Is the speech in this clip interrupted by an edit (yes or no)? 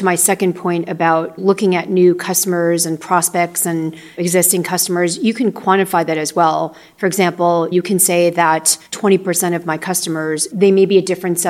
yes